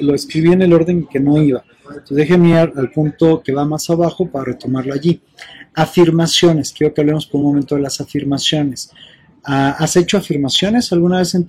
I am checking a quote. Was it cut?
no; 0 cuts

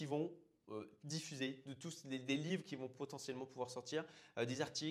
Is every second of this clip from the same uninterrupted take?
yes; 0 cuts

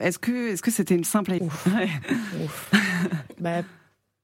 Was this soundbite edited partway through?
yes; 2 cuts; at 1.0 s, 1.4 s

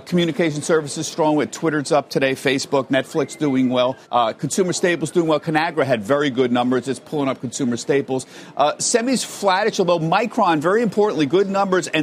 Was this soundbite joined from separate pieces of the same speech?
yes; 1 cut; at 4.0 s

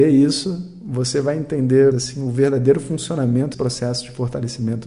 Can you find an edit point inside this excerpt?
yes; 2 cuts; at 1.9 s, 3.5 s

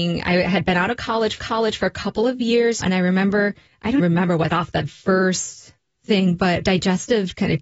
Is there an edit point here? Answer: yes; 7 cuts; at 1.4 s, 2.8 s, 3.7 s, 4.0 s, 4.5 s, 4.9 s, 6.6 s

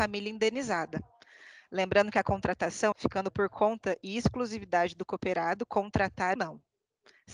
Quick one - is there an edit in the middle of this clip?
yes; 2 cuts; at 2.9 s, 6.4 s

